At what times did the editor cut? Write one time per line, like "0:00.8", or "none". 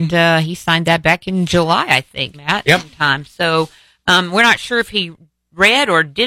0:02.3